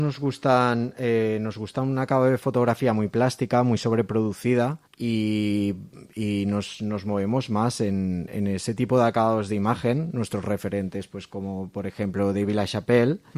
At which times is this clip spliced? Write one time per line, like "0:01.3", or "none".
0:04.9